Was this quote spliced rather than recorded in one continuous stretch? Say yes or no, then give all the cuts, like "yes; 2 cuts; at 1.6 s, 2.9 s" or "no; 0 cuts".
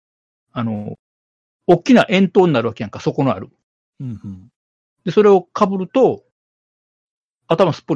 no; 0 cuts